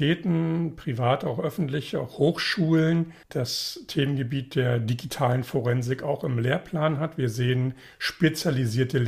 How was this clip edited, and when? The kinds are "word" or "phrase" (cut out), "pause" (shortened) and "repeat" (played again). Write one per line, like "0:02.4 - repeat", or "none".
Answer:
0:03.2 - pause